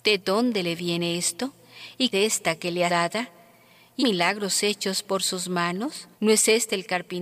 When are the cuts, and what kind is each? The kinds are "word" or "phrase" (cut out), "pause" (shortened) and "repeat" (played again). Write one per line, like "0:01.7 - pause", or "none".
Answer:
0:02.1 - phrase
0:02.9 - phrase
0:04.0 - word
0:06.1 - pause